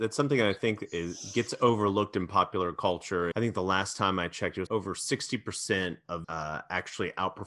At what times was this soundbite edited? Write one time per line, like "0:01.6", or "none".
0:03.3
0:04.7
0:06.2